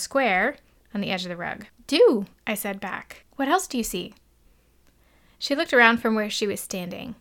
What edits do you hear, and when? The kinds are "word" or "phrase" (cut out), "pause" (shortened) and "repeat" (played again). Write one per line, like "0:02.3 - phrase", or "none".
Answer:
0:01.7 - pause
0:03.3 - pause